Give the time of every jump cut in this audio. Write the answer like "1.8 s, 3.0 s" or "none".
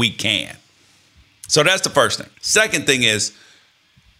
2.3 s